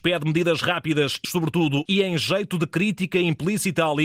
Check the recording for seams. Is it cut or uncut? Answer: cut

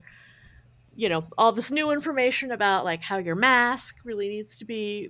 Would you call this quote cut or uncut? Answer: uncut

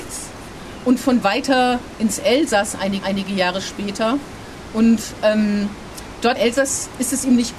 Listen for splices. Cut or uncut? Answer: cut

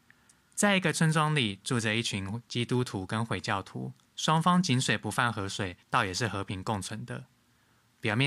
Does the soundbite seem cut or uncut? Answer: cut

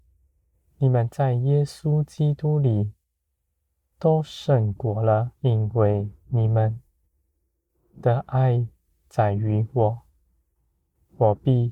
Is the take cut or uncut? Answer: cut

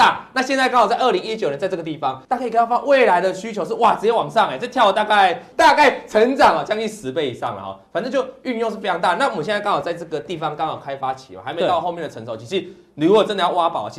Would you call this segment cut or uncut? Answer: cut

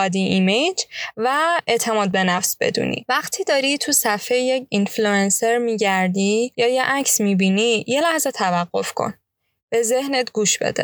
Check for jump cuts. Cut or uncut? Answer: uncut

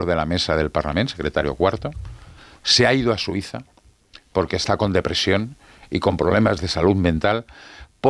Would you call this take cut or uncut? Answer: uncut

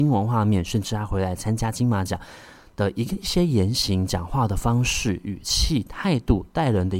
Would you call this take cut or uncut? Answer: uncut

